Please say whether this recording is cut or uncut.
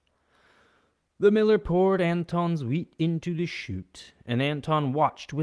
uncut